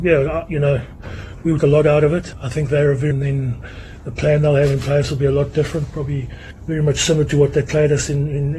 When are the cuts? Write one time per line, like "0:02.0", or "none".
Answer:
0:01.6
0:03.1